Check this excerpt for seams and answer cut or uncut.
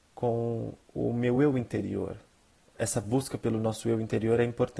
uncut